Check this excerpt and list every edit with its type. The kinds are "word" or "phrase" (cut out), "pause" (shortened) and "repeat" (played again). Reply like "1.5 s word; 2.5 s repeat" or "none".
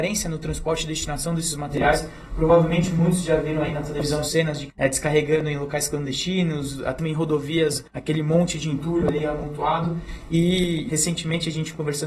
4.7 s word; 7.0 s word; 7.9 s pause; 10.9 s word